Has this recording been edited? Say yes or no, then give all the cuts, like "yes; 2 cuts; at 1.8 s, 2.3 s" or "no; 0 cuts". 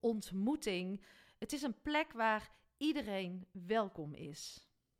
no; 0 cuts